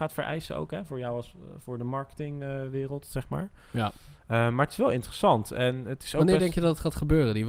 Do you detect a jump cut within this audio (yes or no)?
no